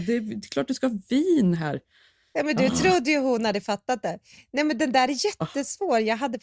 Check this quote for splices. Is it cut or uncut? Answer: uncut